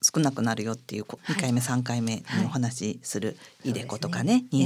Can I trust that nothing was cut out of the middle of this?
no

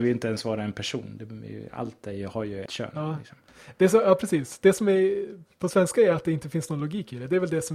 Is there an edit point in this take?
yes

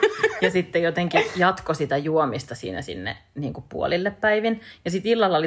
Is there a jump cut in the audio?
no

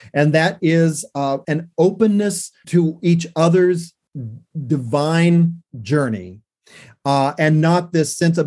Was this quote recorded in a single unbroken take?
no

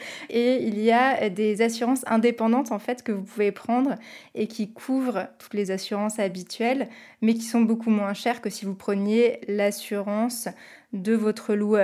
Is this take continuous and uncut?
yes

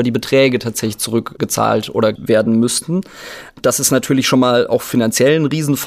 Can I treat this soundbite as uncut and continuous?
no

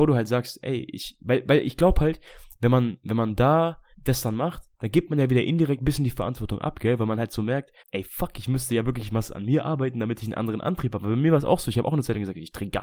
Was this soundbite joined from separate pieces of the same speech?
yes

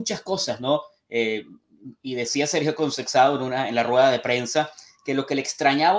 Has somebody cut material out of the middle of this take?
no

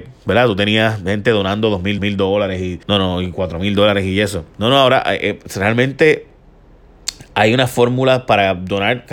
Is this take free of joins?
no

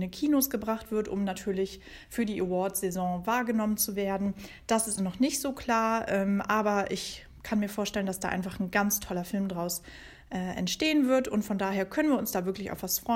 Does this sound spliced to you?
yes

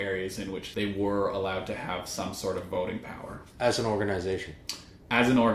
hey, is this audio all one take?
yes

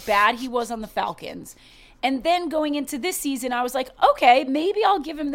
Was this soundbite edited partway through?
no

